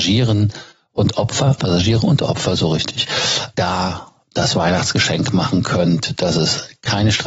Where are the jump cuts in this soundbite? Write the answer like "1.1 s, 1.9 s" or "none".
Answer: 1.6 s, 3.5 s